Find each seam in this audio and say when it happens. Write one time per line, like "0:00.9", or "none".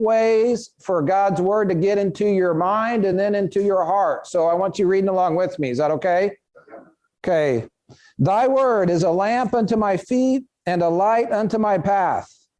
none

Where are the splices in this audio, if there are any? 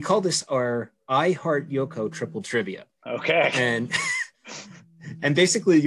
0:02.9
0:04.3

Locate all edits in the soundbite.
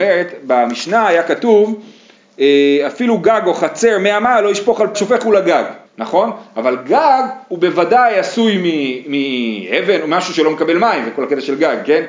0:04.9
0:05.9

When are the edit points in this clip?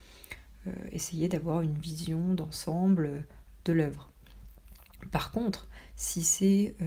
none

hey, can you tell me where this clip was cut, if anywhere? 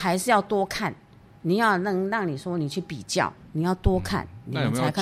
none

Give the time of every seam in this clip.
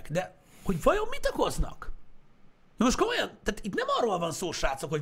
0:02.6

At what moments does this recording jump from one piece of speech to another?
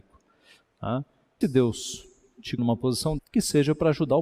0:01.4
0:02.6
0:03.2

